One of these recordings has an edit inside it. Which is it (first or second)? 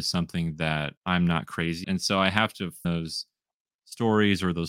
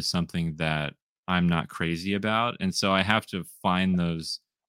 first